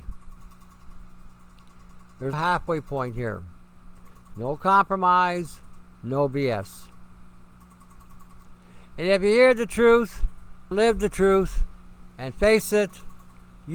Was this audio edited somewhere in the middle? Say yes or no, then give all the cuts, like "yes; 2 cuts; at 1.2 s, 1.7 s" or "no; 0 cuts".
yes; 2 cuts; at 2.3 s, 10.7 s